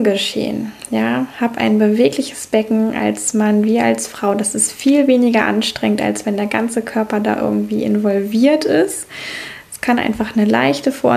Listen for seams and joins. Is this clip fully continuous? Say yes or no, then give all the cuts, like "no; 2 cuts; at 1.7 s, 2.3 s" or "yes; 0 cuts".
yes; 0 cuts